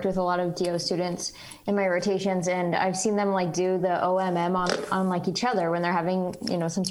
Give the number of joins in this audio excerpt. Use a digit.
0